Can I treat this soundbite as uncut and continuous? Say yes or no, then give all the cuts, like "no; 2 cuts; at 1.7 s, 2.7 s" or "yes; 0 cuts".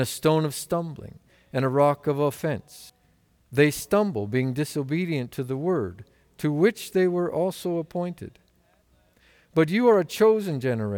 yes; 0 cuts